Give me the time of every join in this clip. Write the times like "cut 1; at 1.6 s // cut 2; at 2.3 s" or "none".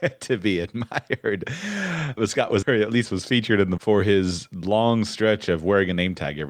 cut 1; at 2.2 s // cut 2; at 2.6 s // cut 3; at 3.8 s